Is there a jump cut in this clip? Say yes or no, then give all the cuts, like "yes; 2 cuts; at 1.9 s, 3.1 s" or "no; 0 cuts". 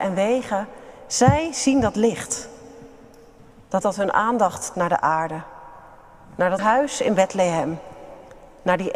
yes; 3 cuts; at 3.8 s, 4.7 s, 6.6 s